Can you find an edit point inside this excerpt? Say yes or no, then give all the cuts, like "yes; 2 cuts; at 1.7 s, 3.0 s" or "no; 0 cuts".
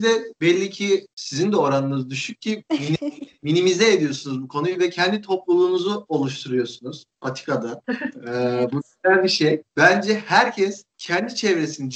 no; 0 cuts